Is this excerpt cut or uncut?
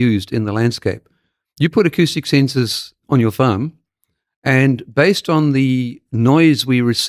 uncut